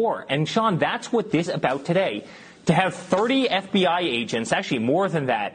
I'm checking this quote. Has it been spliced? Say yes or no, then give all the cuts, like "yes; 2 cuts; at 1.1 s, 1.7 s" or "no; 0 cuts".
yes; 1 cut; at 1.5 s